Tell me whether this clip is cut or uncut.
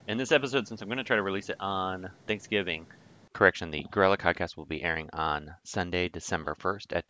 uncut